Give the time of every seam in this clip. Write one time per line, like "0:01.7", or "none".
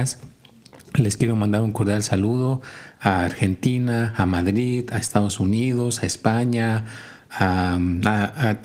none

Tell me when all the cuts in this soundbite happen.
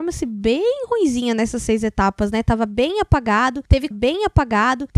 0:03.9

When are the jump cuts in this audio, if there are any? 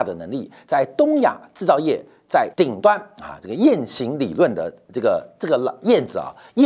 0:02.5

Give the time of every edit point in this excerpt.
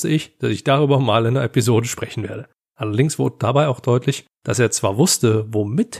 0:02.5
0:04.3

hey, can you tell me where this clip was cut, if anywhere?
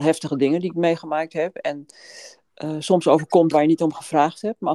0:03.5

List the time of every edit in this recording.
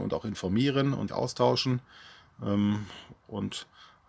0:01.1

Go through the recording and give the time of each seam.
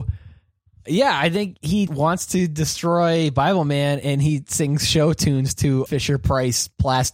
0:01.9
0:05.9

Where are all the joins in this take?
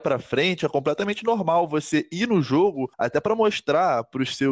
0:02.9

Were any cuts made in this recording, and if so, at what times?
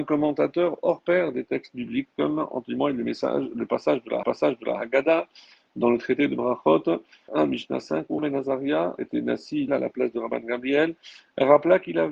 0:04.2
0:07.3
0:08.2
0:09.0
0:09.7

